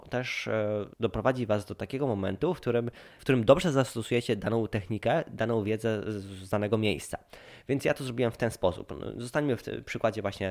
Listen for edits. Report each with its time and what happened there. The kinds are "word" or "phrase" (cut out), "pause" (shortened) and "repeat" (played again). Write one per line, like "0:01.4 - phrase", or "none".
0:00.9 - pause